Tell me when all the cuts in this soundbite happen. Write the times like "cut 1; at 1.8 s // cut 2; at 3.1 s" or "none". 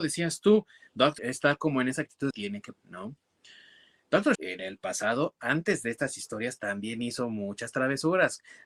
cut 1; at 1.2 s // cut 2; at 2.3 s // cut 3; at 2.7 s // cut 4; at 4.3 s